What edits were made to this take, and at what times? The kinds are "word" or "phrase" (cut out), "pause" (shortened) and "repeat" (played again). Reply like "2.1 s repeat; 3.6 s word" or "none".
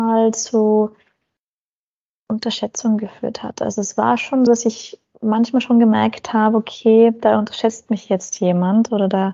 4.5 s word